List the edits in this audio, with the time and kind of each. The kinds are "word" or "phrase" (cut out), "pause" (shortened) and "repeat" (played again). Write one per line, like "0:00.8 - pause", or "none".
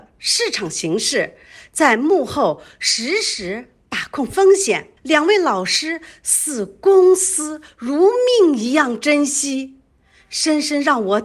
0:05.0 - pause